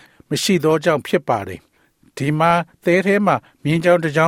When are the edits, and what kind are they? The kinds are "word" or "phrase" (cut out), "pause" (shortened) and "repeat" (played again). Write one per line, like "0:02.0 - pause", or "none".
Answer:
none